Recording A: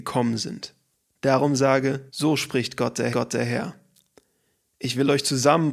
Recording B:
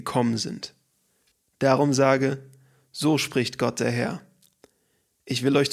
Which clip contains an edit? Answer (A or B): A